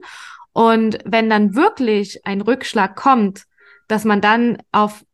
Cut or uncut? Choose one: uncut